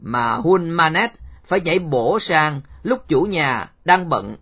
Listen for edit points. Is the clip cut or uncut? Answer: uncut